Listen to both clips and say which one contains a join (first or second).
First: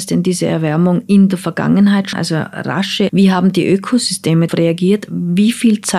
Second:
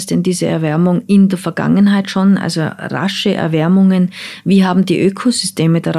first